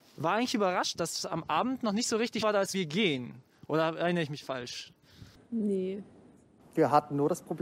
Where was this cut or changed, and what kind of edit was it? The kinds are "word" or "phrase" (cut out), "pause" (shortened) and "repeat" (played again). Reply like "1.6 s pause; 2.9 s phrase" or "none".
0.9 s word; 2.4 s word; 2.7 s word